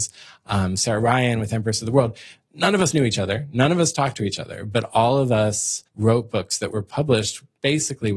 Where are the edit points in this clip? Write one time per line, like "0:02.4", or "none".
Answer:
0:05.9